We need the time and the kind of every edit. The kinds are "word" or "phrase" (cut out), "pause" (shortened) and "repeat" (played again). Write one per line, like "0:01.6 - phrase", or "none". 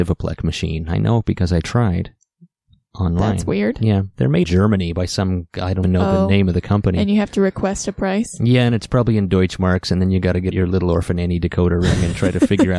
0:04.4 - word
0:05.8 - word
0:10.5 - word

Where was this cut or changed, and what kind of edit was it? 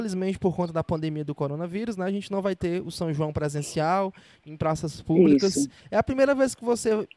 none

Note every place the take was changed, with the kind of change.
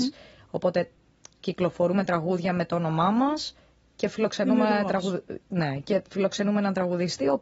none

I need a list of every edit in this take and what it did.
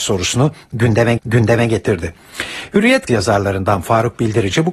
0:01.2 - repeat
0:03.1 - word

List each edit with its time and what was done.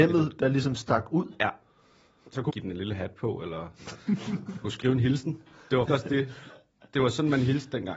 0:02.5 - word
0:04.6 - word
0:05.9 - word

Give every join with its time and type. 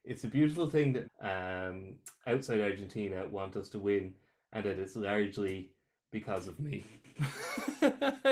0:01.0 - phrase

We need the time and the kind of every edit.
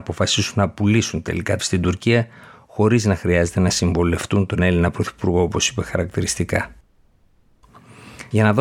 0:01.6 - phrase

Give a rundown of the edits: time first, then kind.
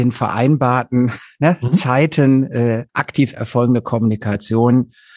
0:02.9 - pause

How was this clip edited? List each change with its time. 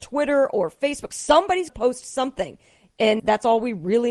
0:01.7 - word
0:03.2 - word

